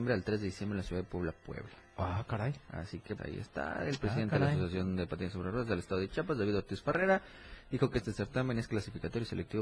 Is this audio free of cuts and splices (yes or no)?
no